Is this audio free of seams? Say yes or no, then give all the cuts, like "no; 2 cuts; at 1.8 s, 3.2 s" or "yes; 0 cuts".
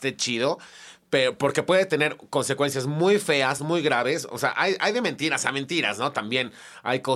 yes; 0 cuts